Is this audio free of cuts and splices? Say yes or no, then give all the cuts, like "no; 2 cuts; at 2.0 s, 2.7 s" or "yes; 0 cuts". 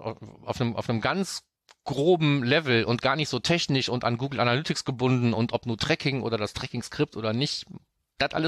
yes; 0 cuts